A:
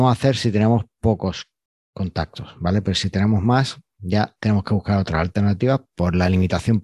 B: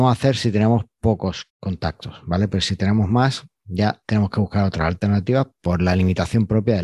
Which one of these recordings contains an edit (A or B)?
B